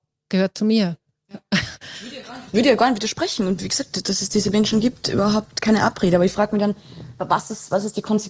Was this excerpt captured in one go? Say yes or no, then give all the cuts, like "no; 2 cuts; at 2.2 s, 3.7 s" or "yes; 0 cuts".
yes; 0 cuts